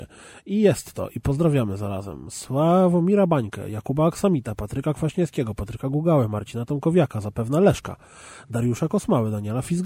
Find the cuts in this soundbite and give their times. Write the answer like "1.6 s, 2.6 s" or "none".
none